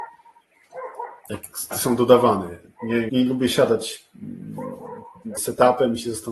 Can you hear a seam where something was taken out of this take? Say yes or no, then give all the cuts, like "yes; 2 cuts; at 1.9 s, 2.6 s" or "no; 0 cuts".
yes; 3 cuts; at 1.7 s, 3.1 s, 5.4 s